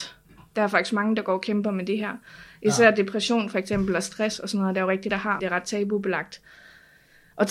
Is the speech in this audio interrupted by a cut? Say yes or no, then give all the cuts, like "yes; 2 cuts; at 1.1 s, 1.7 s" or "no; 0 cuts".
yes; 2 cuts; at 5.1 s, 5.4 s